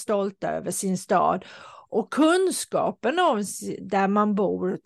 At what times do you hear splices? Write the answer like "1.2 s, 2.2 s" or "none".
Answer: none